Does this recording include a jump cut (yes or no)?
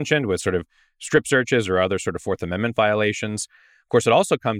no